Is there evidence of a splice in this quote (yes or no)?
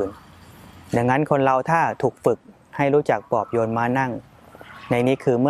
no